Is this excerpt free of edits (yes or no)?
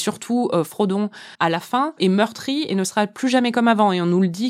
no